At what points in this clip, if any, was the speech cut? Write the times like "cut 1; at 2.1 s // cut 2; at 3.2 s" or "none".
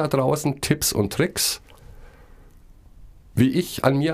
none